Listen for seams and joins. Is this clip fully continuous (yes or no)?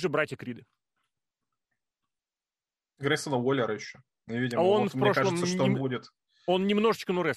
yes